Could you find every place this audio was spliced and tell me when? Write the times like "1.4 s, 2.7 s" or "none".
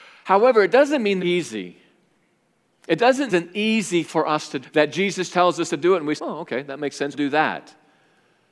1.2 s, 3.3 s, 4.0 s, 4.6 s, 5.3 s, 6.2 s, 7.1 s